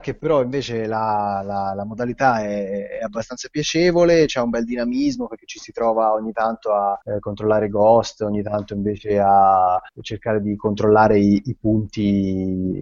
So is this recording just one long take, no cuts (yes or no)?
no